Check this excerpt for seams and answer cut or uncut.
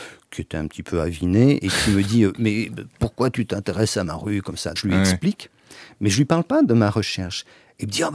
cut